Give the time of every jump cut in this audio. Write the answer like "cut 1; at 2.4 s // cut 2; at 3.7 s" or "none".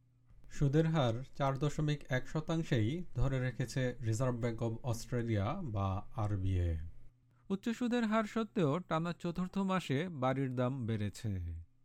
none